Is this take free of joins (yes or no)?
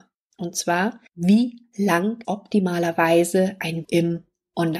no